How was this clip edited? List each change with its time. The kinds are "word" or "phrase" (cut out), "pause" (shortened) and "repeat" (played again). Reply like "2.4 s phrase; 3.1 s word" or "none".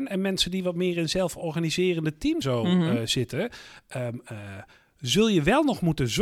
2.4 s word